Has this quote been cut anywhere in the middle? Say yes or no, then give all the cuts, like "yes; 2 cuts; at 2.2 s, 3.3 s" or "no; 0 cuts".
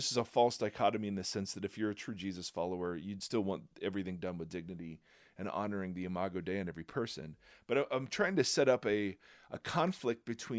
no; 0 cuts